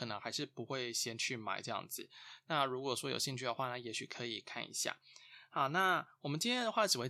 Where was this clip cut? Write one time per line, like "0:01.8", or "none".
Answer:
none